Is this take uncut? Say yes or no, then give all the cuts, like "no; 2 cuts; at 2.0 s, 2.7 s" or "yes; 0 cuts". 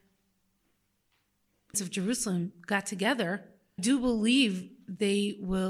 no; 2 cuts; at 1.7 s, 3.8 s